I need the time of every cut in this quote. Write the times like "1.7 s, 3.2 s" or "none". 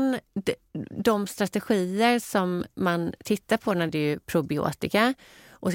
3.9 s